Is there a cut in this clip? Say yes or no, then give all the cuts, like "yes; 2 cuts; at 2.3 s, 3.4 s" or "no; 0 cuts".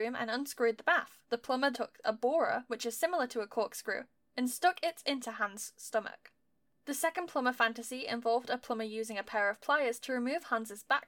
yes; 2 cuts; at 1.2 s, 1.7 s